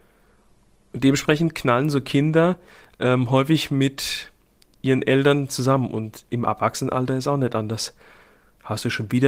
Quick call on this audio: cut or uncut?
uncut